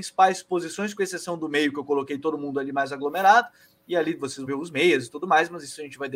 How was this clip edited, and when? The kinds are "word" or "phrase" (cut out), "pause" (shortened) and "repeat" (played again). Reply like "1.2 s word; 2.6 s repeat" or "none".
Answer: 4.5 s word